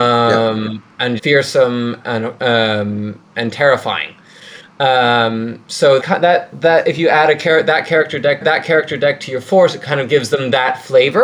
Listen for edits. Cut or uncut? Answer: cut